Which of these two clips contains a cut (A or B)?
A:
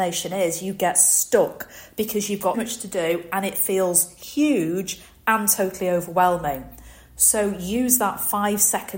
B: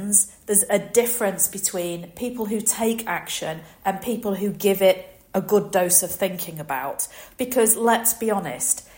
A